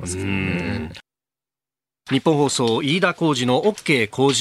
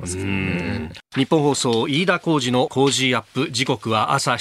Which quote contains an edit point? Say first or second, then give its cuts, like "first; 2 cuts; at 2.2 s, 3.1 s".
second; 2 cuts; at 1.1 s, 2.7 s